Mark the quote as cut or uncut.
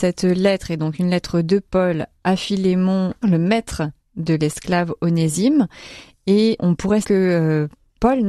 cut